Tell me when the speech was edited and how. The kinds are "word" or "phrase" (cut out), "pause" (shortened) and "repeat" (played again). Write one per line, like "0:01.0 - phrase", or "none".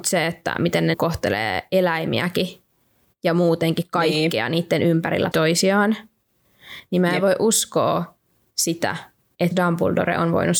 0:00.9 - word
0:05.3 - word
0:09.5 - word